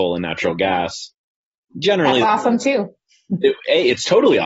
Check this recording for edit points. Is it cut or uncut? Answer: cut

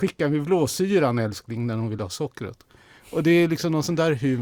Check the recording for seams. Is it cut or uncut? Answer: uncut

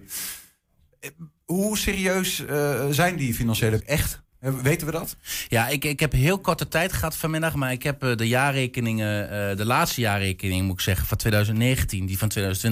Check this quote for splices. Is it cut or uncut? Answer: cut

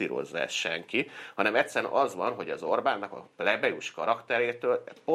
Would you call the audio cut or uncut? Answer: uncut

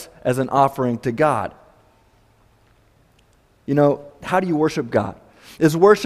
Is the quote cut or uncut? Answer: uncut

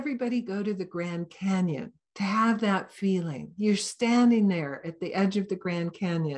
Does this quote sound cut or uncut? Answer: uncut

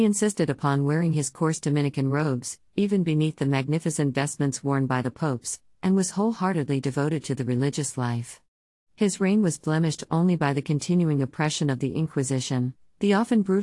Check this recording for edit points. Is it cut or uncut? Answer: uncut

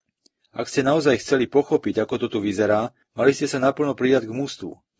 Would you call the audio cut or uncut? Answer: uncut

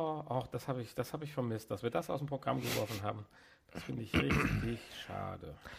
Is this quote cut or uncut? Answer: uncut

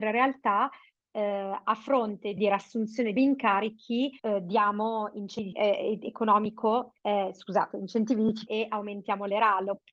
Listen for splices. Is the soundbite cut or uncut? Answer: cut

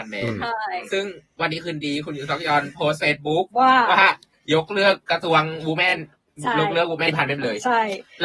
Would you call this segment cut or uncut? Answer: cut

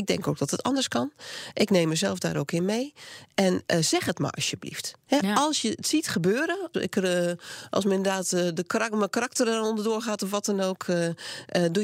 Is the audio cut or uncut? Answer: cut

